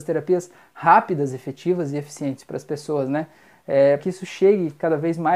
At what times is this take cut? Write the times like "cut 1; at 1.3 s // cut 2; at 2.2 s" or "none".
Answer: cut 1; at 4.0 s